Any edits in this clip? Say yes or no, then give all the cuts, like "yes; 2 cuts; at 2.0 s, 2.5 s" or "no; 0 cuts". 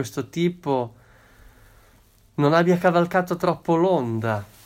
no; 0 cuts